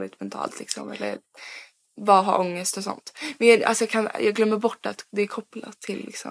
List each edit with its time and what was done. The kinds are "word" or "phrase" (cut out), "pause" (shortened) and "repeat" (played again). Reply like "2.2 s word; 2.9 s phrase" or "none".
none